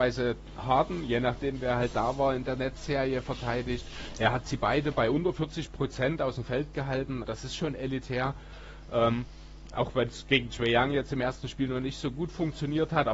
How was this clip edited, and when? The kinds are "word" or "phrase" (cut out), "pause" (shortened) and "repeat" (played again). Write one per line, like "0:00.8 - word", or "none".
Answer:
0:07.2 - word